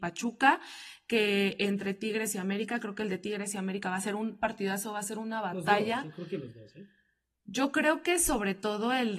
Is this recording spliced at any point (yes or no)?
yes